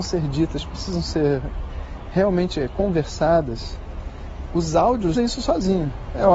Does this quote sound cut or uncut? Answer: cut